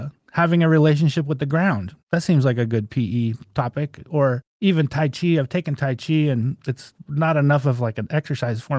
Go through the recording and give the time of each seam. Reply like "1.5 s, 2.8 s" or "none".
2.0 s, 4.5 s